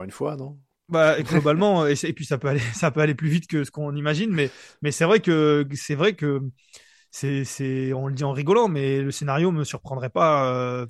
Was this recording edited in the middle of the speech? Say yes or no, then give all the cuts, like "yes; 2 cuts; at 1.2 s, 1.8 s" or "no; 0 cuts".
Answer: no; 0 cuts